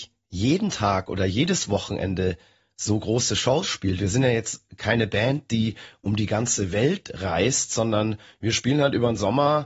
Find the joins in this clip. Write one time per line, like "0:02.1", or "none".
none